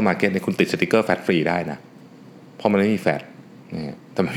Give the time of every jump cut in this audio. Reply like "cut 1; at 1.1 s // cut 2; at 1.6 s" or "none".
none